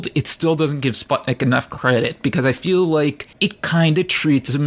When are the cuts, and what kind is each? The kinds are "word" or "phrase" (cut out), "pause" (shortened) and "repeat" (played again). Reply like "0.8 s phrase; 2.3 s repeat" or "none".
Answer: 3.3 s pause